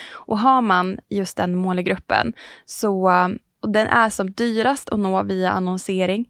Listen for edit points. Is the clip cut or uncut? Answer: uncut